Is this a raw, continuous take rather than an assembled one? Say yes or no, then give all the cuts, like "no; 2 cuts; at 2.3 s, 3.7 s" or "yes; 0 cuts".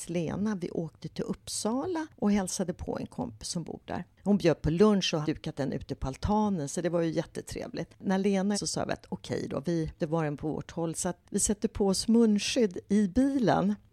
no; 4 cuts; at 5.2 s, 8.5 s, 10.0 s, 11.2 s